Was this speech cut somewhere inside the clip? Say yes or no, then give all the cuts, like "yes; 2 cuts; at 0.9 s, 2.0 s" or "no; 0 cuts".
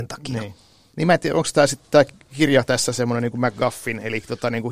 no; 0 cuts